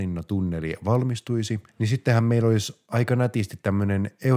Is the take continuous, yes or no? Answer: no